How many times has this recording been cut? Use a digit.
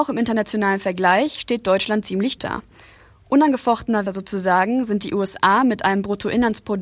2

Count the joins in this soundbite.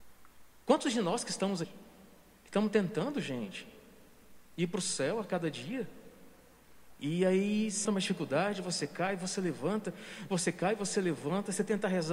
3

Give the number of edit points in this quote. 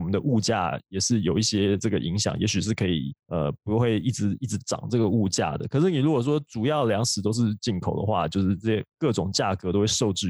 1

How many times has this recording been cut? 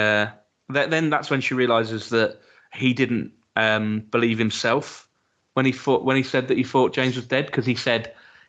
0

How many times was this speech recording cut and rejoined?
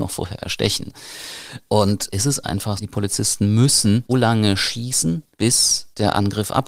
3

